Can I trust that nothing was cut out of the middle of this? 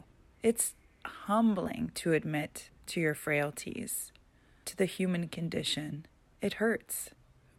yes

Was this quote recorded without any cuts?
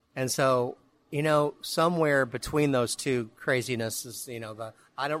yes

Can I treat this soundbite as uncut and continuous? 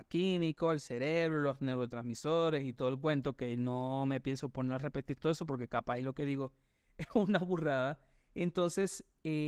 yes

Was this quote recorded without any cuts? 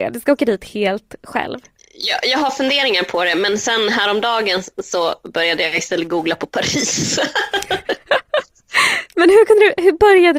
yes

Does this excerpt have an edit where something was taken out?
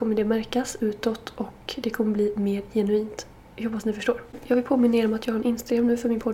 no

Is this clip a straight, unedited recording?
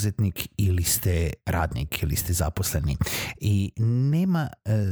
yes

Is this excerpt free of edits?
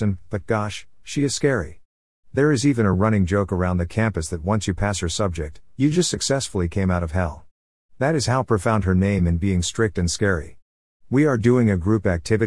yes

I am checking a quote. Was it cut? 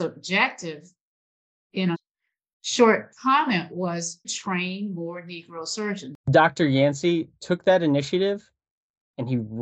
yes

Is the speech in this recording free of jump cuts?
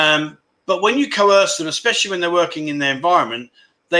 yes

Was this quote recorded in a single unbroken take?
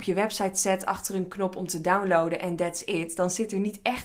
yes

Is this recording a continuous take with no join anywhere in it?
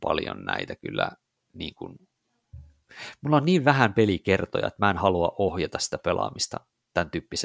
no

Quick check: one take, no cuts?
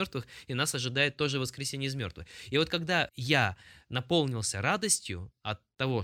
yes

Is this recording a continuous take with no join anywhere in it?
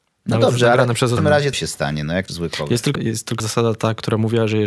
no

